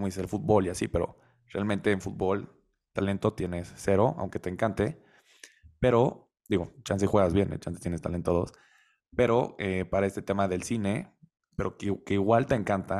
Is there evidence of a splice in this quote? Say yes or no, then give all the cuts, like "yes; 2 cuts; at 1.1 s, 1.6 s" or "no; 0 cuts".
no; 0 cuts